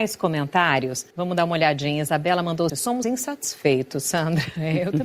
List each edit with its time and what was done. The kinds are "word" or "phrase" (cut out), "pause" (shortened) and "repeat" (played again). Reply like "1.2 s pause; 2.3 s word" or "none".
1.1 s pause; 2.7 s word; 3.0 s word